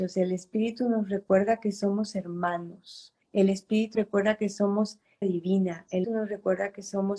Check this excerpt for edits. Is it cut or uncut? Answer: cut